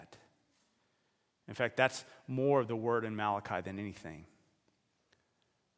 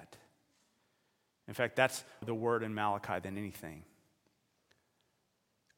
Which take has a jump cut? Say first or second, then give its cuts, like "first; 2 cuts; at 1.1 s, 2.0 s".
second; 1 cut; at 2.2 s